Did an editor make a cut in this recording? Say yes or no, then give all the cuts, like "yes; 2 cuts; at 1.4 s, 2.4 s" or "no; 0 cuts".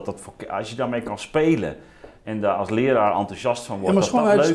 no; 0 cuts